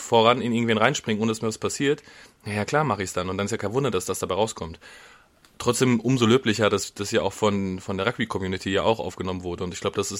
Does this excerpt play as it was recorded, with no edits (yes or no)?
yes